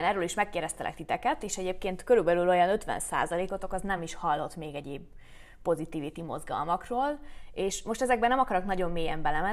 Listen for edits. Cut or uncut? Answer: uncut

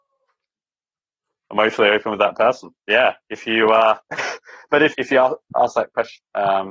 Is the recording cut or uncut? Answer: cut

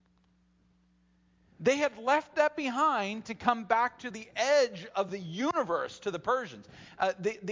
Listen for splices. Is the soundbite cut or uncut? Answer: uncut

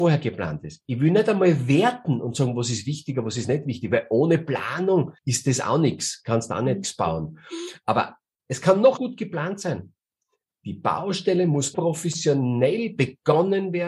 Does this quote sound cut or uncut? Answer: cut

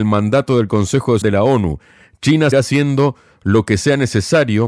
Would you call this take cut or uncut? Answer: cut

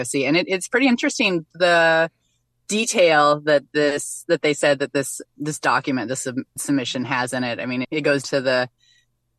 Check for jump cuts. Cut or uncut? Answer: cut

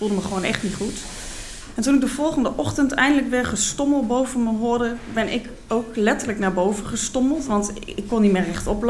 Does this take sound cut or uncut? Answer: uncut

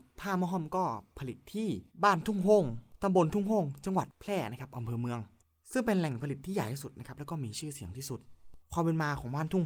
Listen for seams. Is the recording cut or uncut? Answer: cut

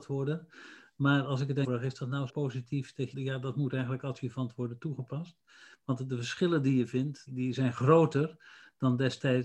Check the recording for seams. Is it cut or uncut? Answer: cut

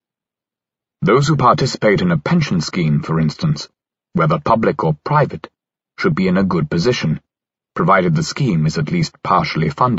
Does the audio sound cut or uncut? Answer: uncut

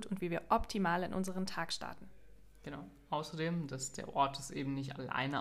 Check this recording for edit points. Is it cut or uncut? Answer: uncut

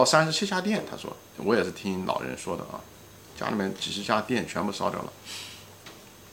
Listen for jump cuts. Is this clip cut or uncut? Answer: cut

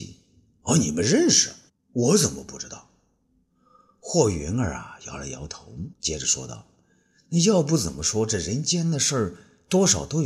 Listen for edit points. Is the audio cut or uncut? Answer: cut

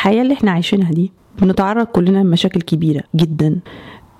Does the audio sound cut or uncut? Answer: cut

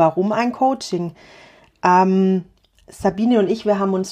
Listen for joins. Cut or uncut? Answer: uncut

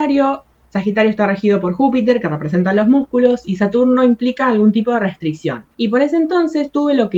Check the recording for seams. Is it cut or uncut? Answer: cut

